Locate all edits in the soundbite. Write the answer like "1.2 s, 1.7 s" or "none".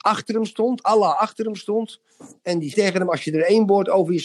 2.7 s